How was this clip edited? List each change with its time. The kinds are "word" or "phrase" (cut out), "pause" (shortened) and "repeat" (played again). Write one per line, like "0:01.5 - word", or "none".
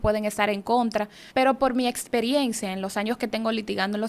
0:01.3 - pause

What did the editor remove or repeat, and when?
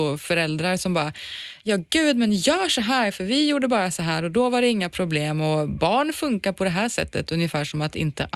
none

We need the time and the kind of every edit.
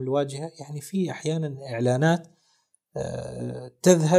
none

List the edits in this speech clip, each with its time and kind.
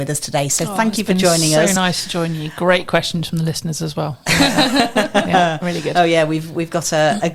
none

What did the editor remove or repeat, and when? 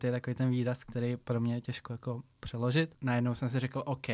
0:02.3 - pause

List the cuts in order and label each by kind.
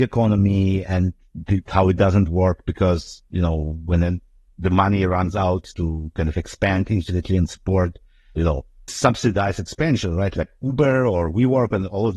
0:08.4 - word
0:08.9 - word

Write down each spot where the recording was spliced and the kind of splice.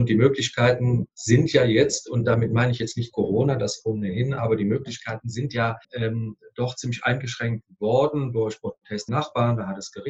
0:05.8 - pause
0:09.1 - word

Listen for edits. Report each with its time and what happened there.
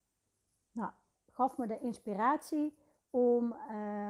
0:01.1 - word

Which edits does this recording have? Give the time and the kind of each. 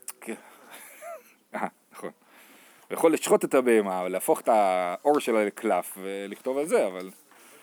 none

